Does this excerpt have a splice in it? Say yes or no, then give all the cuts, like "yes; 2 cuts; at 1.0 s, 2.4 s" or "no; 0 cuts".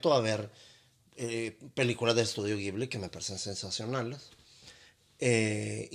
no; 0 cuts